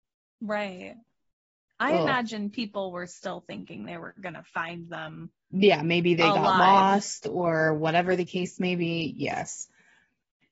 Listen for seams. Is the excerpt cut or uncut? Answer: uncut